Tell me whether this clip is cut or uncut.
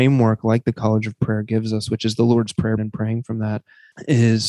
cut